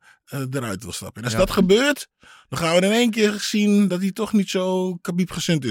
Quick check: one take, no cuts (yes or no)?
yes